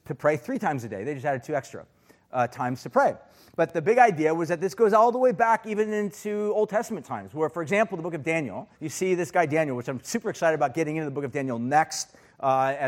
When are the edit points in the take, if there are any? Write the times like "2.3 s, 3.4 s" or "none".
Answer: 8.7 s